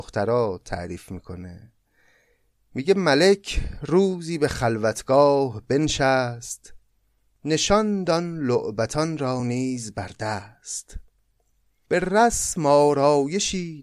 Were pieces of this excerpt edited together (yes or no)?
no